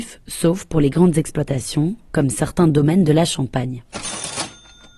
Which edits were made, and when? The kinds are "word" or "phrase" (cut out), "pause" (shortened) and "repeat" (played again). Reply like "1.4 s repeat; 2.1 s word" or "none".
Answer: none